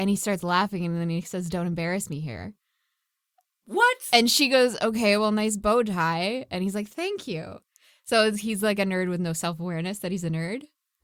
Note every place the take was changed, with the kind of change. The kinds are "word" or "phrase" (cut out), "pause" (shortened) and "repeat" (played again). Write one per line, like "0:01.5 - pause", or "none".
none